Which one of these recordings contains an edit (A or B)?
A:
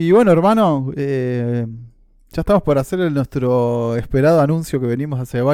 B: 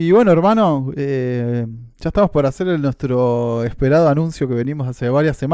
B